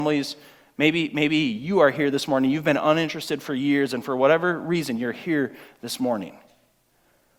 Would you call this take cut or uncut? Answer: uncut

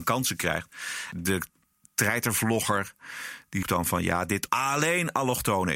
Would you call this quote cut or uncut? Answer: cut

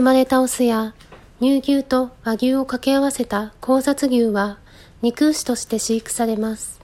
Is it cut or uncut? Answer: uncut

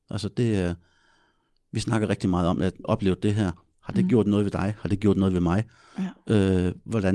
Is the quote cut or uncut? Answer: cut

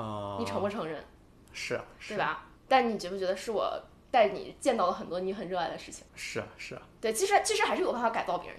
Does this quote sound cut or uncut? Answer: cut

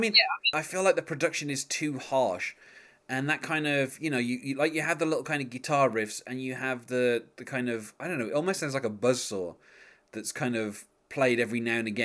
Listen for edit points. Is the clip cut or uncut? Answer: uncut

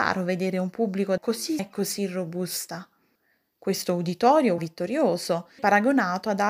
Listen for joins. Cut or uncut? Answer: cut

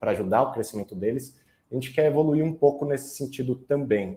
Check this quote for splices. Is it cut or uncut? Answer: uncut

